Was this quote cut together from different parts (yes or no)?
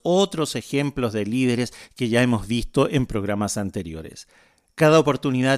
no